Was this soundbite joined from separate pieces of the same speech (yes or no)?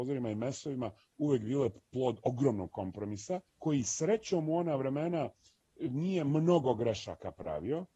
yes